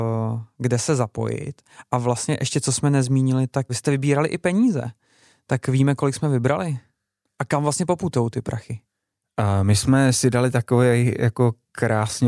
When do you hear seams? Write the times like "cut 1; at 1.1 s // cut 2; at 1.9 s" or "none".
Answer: cut 1; at 3.7 s